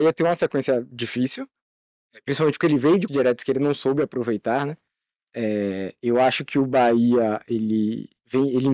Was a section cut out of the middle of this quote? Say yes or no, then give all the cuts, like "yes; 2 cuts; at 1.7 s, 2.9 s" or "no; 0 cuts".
yes; 1 cut; at 3.1 s